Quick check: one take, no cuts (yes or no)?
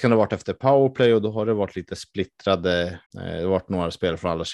no